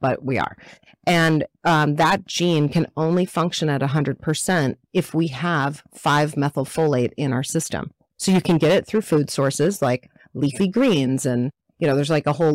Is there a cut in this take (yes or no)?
no